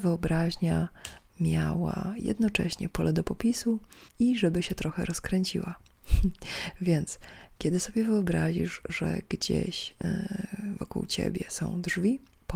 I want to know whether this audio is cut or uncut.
cut